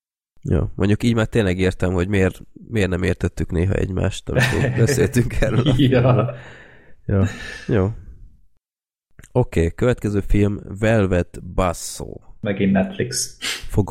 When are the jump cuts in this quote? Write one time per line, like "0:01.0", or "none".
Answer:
none